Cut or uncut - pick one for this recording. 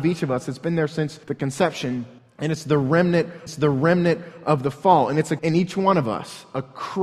cut